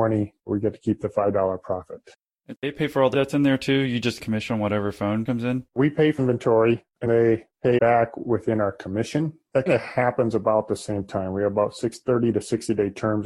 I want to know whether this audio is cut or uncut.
cut